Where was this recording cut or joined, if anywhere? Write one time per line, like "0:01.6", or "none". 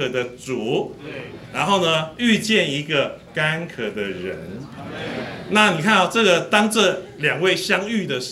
none